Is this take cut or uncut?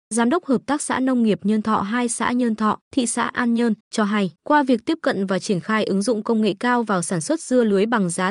cut